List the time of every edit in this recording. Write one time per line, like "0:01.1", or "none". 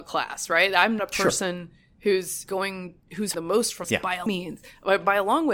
0:01.0
0:02.4
0:03.3
0:03.8
0:04.3